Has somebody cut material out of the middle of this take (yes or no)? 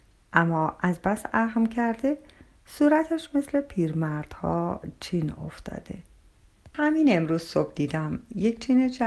no